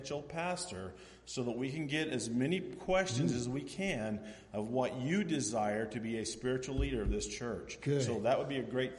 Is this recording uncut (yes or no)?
yes